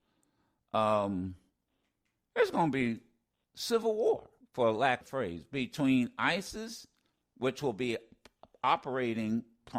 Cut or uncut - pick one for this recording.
cut